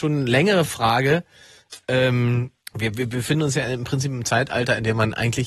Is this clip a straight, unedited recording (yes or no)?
no